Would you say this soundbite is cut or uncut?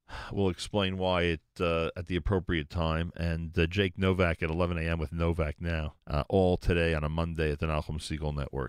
cut